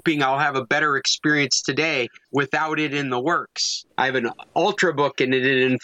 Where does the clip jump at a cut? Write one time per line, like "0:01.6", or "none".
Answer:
none

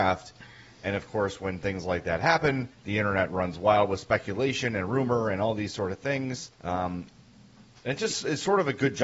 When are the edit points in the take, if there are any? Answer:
0:02.7
0:06.5

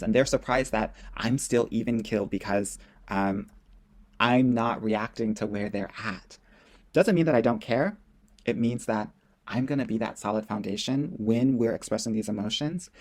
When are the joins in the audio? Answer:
none

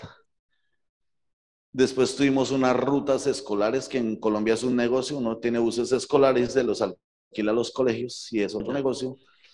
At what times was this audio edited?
none

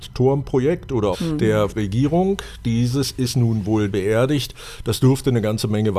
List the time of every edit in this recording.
0:01.1
0:01.7
0:03.9

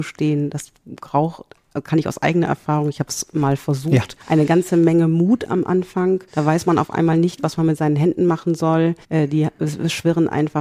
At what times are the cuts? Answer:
0:04.2
0:06.3
0:09.0

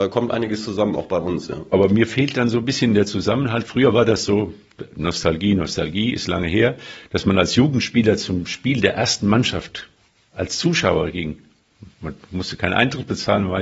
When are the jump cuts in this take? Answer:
none

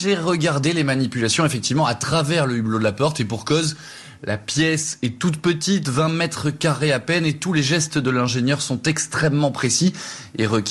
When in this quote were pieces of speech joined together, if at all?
none

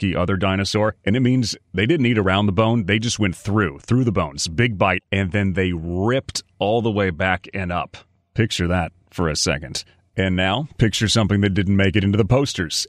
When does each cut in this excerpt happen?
none

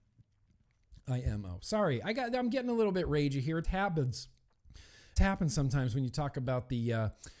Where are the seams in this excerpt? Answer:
0:03.6
0:05.2

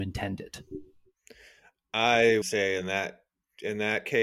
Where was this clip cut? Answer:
0:02.4

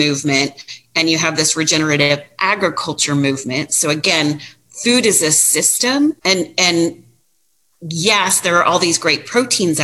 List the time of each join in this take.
0:06.2

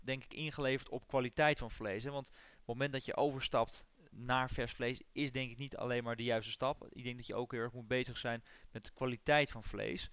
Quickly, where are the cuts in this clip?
none

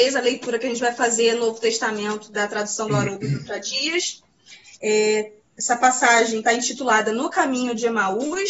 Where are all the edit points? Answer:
none

